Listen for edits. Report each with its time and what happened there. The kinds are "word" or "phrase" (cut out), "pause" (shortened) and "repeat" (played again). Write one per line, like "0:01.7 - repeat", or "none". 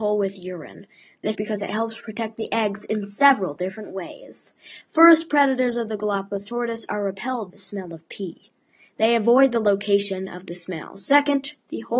0:01.3 - phrase
0:07.5 - word